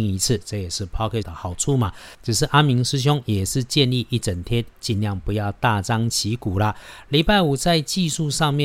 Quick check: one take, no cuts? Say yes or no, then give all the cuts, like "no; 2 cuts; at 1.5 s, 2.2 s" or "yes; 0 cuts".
no; 1 cut; at 1.2 s